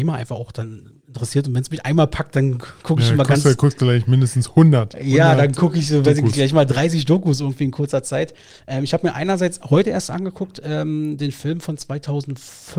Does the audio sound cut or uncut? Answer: uncut